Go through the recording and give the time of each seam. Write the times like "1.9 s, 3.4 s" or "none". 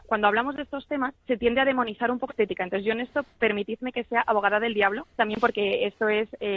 1.2 s, 2.3 s, 5.1 s